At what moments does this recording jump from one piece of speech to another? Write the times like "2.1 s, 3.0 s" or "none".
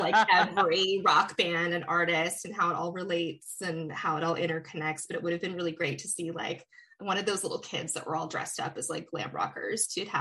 none

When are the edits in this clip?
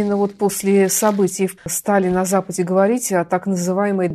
1.6 s

